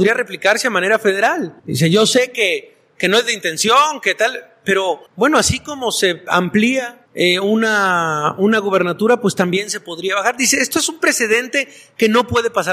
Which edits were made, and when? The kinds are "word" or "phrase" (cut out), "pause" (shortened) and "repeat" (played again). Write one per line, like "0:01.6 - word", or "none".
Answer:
0:01.6 - pause
0:05.1 - pause
0:07.1 - pause